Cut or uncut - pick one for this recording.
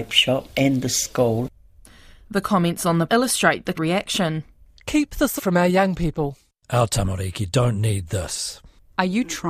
cut